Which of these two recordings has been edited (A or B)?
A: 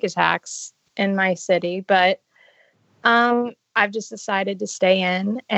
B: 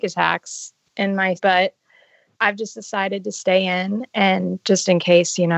B